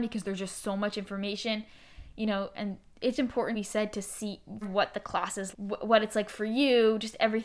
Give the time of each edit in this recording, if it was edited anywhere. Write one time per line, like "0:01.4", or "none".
0:03.1
0:03.5
0:04.6
0:05.5